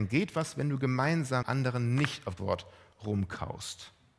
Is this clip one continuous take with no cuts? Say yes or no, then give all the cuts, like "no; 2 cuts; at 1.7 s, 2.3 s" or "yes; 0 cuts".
no; 2 cuts; at 1.4 s, 2.4 s